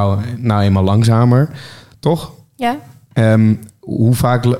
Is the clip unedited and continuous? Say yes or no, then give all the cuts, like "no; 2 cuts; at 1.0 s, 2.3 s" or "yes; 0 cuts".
yes; 0 cuts